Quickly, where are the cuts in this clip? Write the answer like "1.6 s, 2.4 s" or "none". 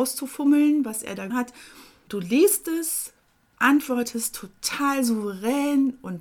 1.3 s, 2.1 s, 3.5 s